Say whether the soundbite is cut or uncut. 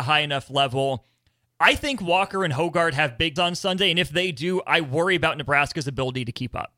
cut